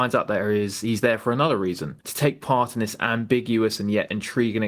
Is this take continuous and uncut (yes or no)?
no